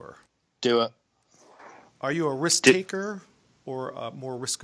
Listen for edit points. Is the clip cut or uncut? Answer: uncut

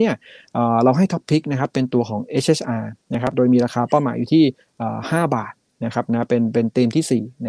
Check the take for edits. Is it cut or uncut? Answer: uncut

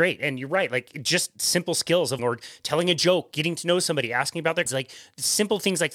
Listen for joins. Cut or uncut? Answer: cut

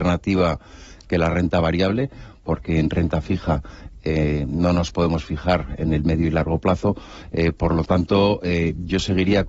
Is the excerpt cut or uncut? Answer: uncut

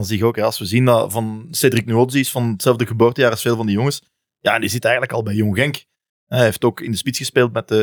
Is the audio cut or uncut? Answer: uncut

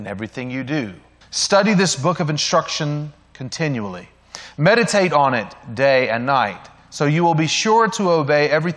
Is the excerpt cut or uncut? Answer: cut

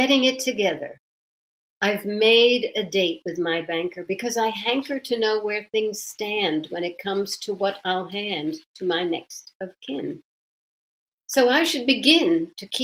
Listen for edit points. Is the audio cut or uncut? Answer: uncut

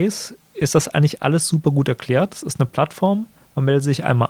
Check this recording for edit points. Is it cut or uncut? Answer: uncut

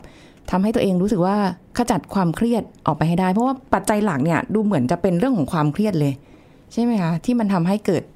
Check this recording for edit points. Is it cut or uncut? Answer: uncut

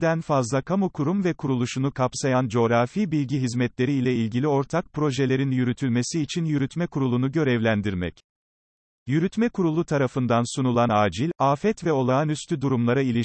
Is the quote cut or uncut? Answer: uncut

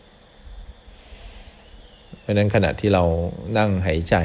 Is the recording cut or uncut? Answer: uncut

